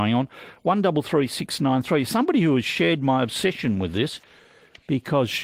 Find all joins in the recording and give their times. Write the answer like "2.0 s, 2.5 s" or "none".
none